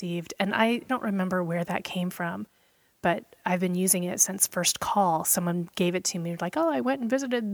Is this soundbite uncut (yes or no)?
yes